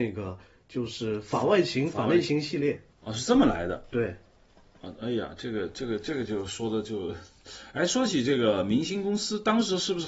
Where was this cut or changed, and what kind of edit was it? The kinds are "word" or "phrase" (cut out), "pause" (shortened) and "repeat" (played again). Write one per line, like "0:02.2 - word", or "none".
0:02.9 - pause